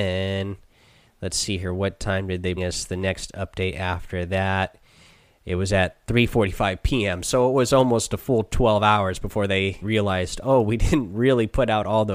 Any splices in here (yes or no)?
yes